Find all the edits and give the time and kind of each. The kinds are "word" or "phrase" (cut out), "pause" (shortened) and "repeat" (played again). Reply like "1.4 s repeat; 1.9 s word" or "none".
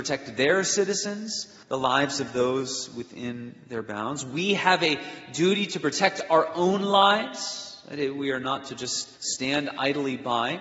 1.6 s pause; 9.2 s pause